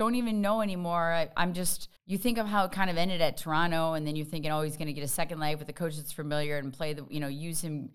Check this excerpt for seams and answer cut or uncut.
cut